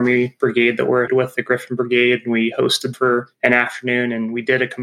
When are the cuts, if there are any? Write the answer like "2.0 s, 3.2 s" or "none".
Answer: 1.1 s, 2.9 s